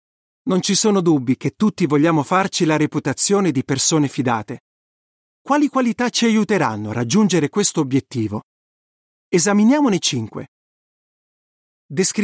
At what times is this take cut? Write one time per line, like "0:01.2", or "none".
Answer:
none